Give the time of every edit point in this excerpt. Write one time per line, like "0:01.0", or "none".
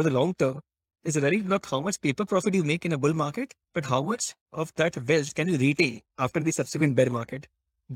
0:03.6
0:06.1